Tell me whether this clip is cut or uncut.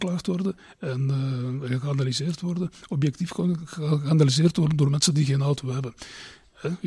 uncut